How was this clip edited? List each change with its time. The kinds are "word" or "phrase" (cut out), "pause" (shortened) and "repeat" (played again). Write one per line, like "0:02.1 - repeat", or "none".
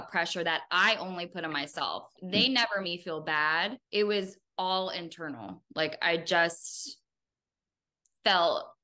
0:02.1 - word
0:02.8 - word
0:03.8 - pause